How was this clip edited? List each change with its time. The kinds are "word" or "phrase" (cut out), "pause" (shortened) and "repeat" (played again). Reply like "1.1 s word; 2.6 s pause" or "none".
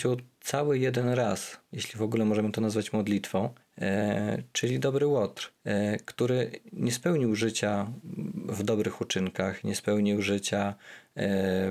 1.7 s pause; 3.6 s pause; 5.6 s pause